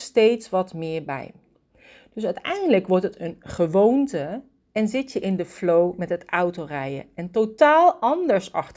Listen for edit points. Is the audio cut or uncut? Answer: uncut